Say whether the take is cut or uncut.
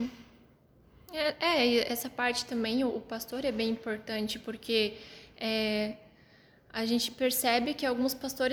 uncut